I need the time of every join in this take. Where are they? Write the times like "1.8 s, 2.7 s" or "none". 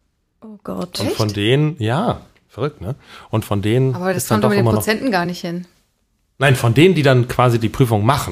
none